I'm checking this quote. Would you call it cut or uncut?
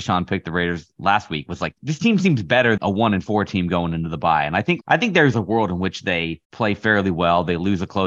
cut